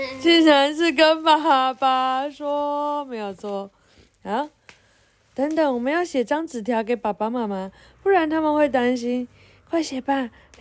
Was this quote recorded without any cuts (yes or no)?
yes